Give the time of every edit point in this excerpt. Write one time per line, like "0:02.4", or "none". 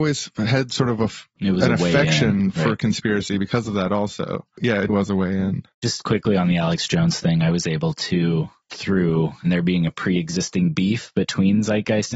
0:04.9
0:08.7

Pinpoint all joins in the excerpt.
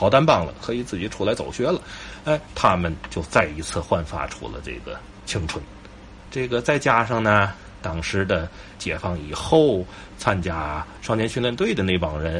0:07.8

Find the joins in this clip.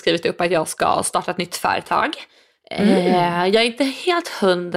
none

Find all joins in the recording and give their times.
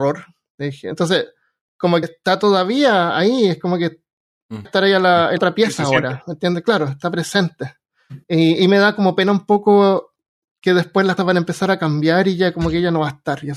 0:02.0
0:04.6
0:05.4
0:08.2
0:11.2

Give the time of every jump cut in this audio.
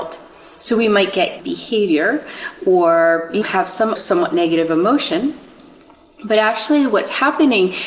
0:01.4
0:03.4
0:03.9

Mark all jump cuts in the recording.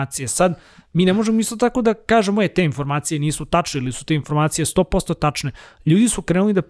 none

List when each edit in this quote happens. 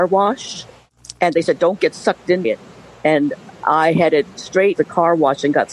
0:02.4
0:04.8

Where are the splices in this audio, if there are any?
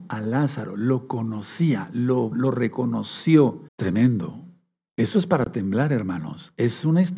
0:02.3
0:03.7

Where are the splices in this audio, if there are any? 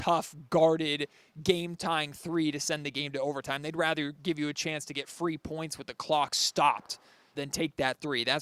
0:07.3

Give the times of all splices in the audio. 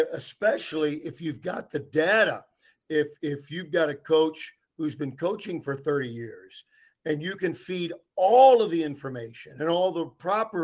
none

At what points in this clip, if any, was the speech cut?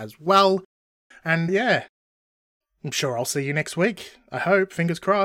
0:01.5

